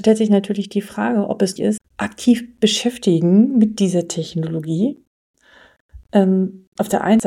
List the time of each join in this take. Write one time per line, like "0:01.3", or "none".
0:01.6
0:01.9